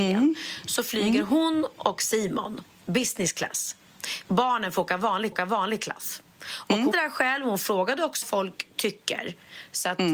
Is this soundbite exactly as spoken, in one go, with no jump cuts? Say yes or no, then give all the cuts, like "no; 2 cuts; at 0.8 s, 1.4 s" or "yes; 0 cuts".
no; 5 cuts; at 2.7 s, 4.2 s, 5.3 s, 6.9 s, 8.2 s